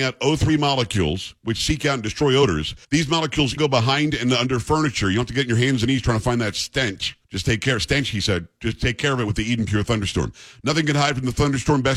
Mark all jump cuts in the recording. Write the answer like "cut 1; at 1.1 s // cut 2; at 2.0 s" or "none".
cut 1; at 2.8 s // cut 2; at 3.6 s // cut 3; at 7.2 s